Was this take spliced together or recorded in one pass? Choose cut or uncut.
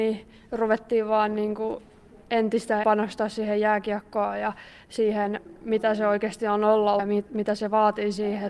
cut